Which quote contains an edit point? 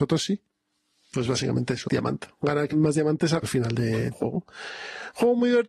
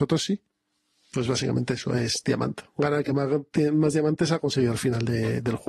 first; 4 cuts; at 1.9 s, 2.7 s, 3.4 s, 4.1 s

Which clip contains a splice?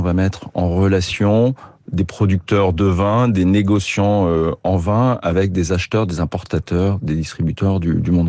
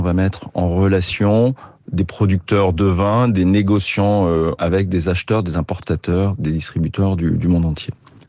second; 1 cut; at 4.6 s

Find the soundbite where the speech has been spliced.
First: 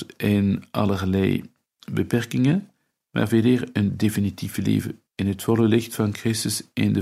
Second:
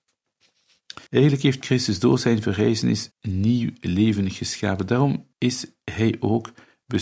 second; 3 cuts; at 1.1 s, 3.1 s, 5.3 s

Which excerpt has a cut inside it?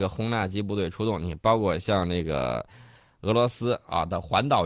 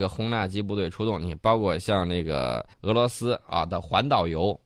second; 1 cut; at 2.7 s

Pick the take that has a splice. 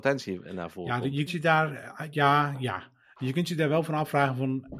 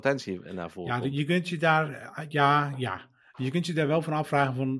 first; 1 cut; at 1.3 s

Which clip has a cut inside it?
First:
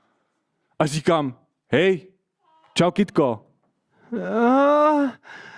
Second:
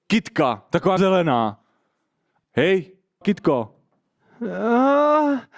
second; 3 cuts; at 1.0 s, 2.4 s, 3.2 s

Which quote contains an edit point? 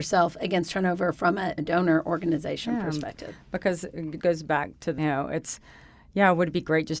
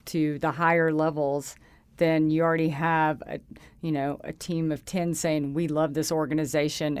first; 3 cuts; at 1.6 s, 4.2 s, 5.0 s

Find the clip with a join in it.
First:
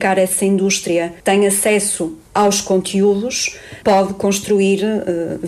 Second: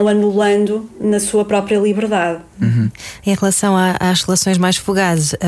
first; 3 cuts; at 1.2 s, 2.3 s, 3.8 s

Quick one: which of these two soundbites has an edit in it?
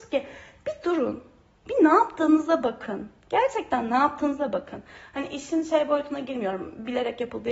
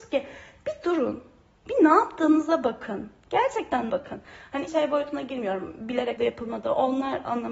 second; 3 cuts; at 3.9 s, 4.7 s, 6.2 s

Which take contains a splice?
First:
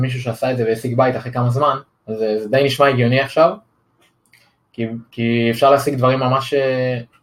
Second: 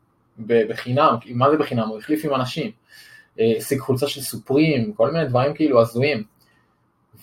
first; 1 cut; at 1.9 s

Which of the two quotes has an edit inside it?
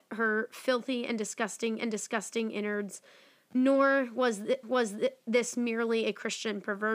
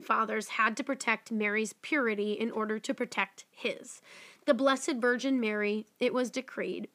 first; 2 cuts; at 1.8 s, 4.6 s

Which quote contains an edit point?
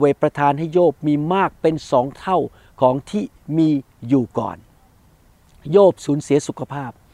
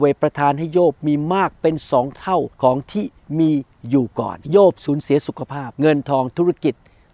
second; 3 cuts; at 2.5 s, 4.4 s, 5.7 s

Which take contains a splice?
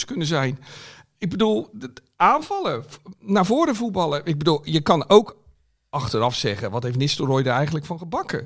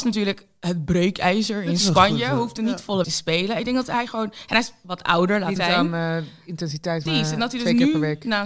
second; 3 cuts; at 3.0 s, 5.6 s, 7.1 s

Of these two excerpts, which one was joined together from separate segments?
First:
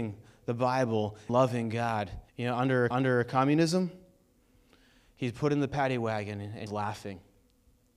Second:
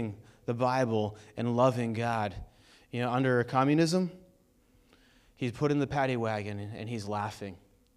first; 4 cuts; at 1.3 s, 2.3 s, 2.9 s, 6.7 s

